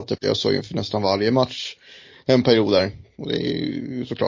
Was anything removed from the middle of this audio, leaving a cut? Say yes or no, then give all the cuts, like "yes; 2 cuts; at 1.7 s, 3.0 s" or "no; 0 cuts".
no; 0 cuts